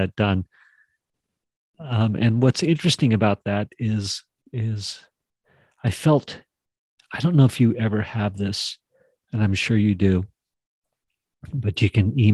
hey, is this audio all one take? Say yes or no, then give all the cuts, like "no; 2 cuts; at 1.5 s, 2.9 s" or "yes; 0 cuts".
yes; 0 cuts